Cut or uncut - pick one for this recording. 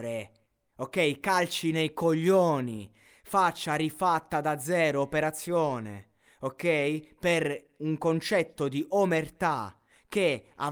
uncut